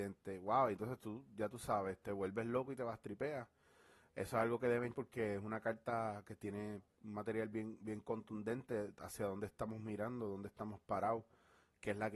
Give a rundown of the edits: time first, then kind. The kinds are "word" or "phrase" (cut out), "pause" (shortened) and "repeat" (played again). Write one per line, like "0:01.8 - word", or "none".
0:04.9 - word

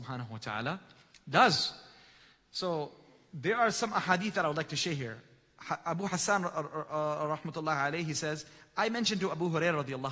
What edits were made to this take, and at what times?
none

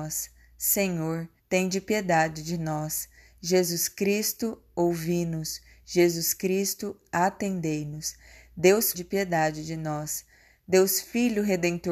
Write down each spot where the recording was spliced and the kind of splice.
0:01.4 - pause
0:08.9 - phrase

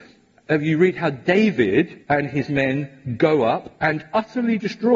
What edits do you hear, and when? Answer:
0:02.0 - pause
0:03.8 - pause

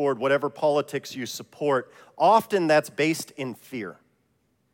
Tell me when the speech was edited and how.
none

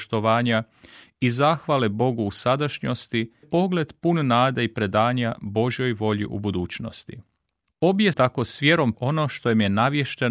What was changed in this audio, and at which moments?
0:03.4 - word
0:08.1 - word
0:08.9 - word

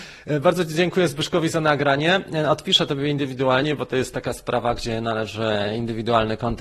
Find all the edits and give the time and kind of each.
none

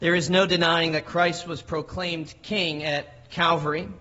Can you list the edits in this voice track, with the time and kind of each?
none

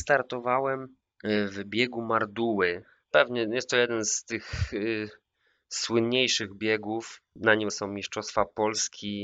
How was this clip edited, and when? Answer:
0:07.7 - word

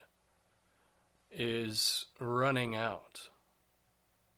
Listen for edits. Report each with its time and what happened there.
0:02.1 - pause

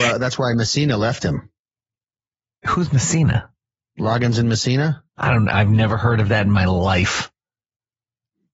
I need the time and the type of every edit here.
0:02.0 - pause
0:05.1 - pause

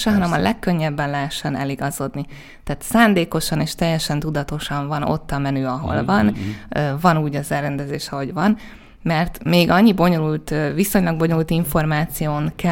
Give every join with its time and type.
none

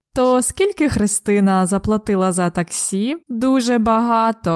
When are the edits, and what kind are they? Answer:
0:03.2 - pause

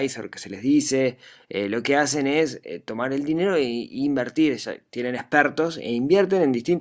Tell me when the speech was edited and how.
none

